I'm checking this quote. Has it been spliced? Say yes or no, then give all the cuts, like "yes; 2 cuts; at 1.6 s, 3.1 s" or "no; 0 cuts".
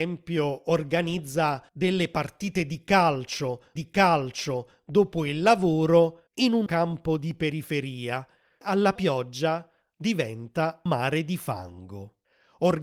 yes; 7 cuts; at 1.7 s, 3.8 s, 6.3 s, 6.7 s, 8.6 s, 9.0 s, 10.9 s